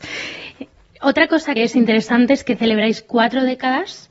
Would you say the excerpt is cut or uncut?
cut